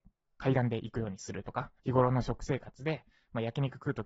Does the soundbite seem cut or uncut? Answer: cut